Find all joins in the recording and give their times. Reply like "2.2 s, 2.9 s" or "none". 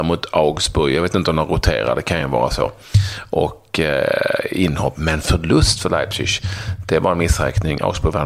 none